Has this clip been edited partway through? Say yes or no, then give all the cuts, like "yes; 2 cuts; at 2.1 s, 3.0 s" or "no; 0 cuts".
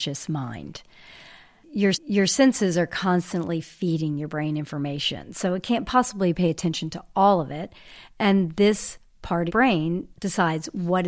yes; 3 cuts; at 1.9 s, 9.5 s, 10.1 s